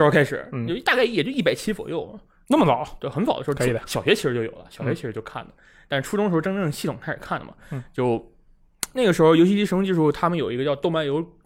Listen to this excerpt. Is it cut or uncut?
uncut